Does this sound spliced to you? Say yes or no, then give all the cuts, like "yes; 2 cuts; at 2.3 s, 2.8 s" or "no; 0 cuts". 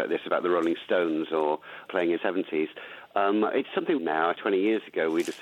yes; 4 cuts; at 1.8 s, 2.2 s, 4.0 s, 4.3 s